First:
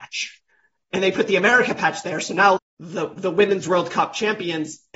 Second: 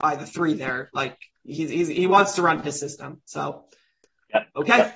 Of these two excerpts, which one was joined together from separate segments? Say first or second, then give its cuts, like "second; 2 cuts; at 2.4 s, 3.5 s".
first; 1 cut; at 2.6 s